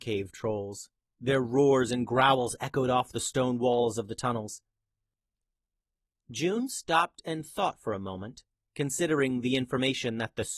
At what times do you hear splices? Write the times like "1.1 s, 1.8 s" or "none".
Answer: none